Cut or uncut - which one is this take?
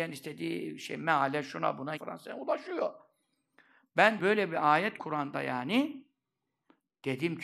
cut